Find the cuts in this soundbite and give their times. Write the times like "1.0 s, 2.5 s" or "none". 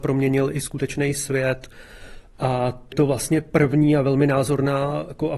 2.9 s